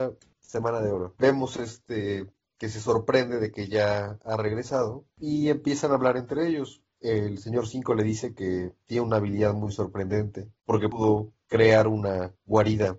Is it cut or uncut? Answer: uncut